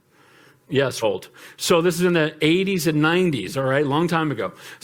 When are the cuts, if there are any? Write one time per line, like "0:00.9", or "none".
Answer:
0:01.0

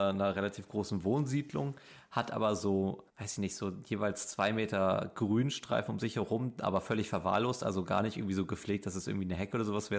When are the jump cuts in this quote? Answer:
0:03.1

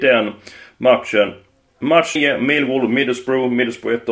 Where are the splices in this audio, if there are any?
0:02.2

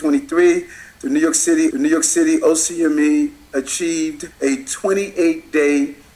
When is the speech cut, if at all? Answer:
0:01.7
0:04.3

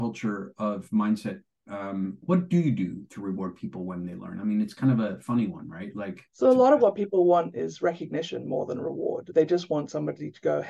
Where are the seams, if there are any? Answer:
0:06.3

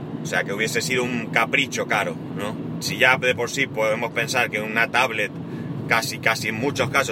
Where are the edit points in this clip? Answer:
none

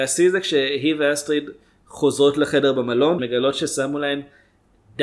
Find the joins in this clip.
0:03.2

